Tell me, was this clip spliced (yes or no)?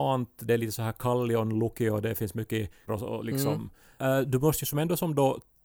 yes